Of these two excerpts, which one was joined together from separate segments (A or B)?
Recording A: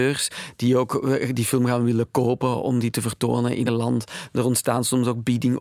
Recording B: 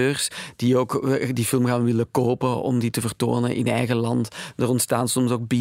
A